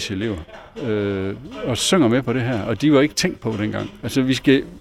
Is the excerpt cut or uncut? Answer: uncut